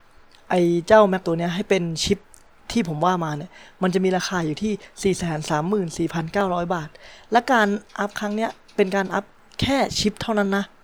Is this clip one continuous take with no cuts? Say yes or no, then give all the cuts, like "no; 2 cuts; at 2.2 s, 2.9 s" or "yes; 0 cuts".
no; 1 cut; at 1.2 s